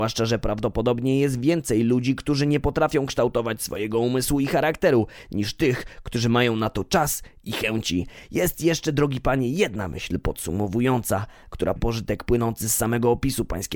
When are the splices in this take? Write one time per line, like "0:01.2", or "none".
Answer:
0:11.8